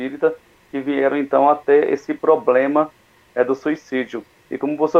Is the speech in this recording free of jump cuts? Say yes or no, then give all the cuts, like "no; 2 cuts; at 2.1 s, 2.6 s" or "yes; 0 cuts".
yes; 0 cuts